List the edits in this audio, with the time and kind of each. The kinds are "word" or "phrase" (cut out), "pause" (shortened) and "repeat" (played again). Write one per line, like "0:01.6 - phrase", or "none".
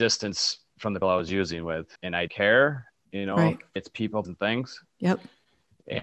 0:01.0 - word
0:02.0 - pause
0:02.3 - word
0:03.8 - word
0:04.2 - word